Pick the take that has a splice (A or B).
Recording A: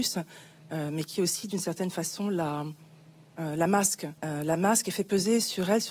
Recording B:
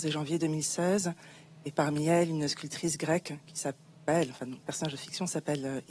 A